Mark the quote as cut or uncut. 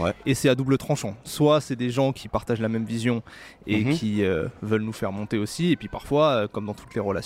uncut